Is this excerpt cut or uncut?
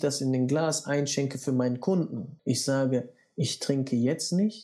uncut